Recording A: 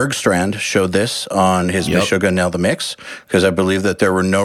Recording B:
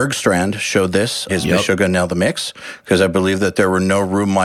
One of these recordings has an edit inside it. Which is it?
B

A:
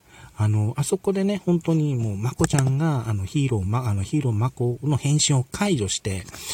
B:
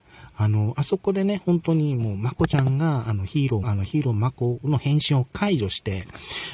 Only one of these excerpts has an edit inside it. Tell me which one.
B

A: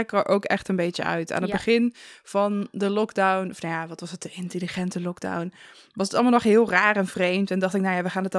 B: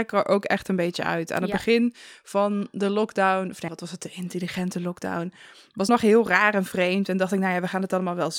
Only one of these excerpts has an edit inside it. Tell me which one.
B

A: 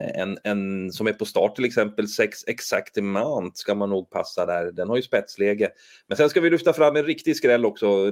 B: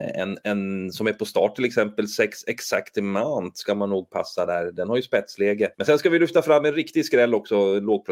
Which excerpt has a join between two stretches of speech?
B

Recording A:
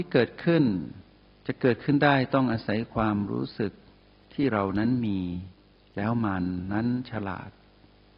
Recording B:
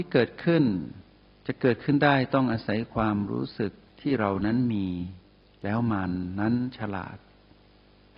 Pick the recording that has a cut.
B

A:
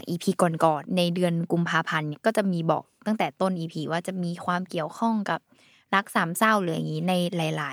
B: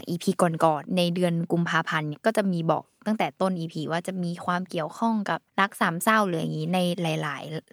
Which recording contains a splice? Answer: B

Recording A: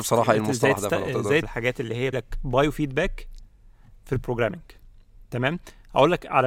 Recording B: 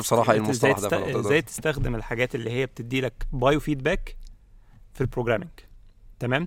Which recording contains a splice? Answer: A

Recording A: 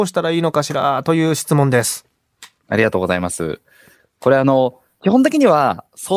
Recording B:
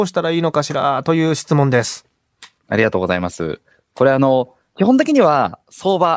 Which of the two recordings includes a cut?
B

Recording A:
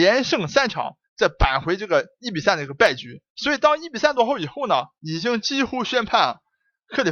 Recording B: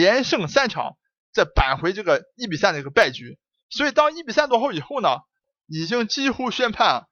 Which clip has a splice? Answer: A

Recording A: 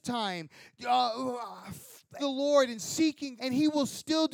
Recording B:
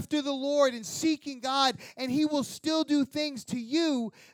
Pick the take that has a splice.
A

